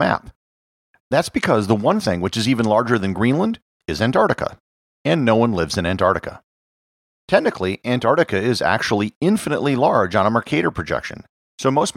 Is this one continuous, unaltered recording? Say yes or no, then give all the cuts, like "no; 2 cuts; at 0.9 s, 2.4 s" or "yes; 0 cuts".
yes; 0 cuts